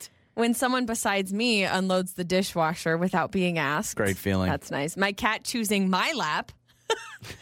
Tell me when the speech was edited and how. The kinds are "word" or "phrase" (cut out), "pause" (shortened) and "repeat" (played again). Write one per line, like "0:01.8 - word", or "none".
none